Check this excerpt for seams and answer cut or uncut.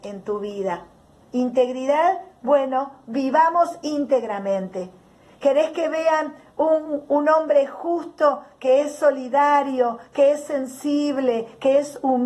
uncut